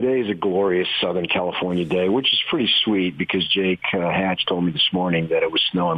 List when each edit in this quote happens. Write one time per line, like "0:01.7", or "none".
none